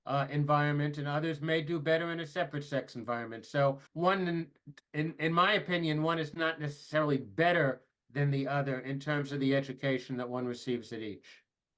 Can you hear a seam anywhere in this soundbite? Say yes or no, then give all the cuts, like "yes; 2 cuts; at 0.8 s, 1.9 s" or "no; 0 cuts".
yes; 1 cut; at 3.9 s